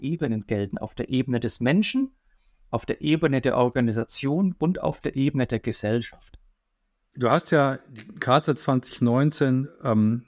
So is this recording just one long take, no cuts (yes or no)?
yes